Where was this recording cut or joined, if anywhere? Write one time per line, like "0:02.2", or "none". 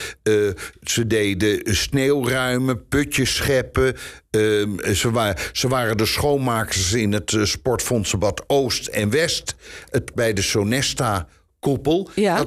0:10.1